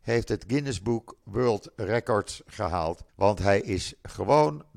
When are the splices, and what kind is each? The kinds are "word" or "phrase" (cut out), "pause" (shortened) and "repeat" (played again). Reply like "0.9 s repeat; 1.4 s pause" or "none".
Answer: 1.2 s word; 3.1 s pause